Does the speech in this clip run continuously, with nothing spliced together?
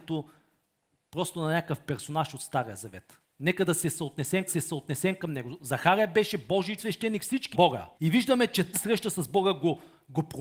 no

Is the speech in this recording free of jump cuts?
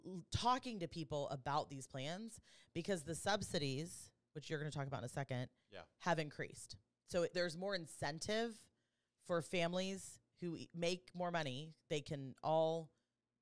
no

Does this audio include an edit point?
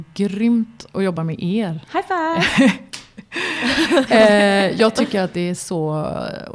no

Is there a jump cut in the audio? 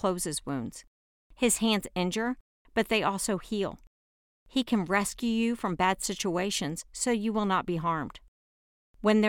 no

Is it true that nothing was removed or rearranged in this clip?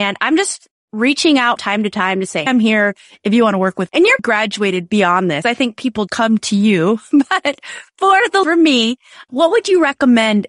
no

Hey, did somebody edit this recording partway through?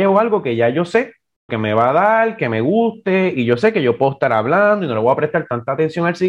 yes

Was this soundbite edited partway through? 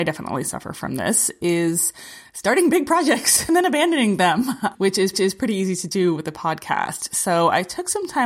yes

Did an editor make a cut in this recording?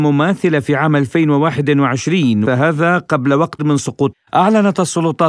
yes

